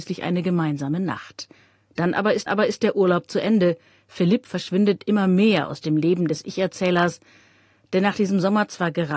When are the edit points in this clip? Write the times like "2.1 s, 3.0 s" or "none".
2.5 s